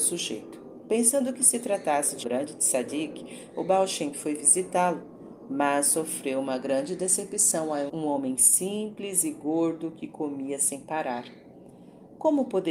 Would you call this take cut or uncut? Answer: cut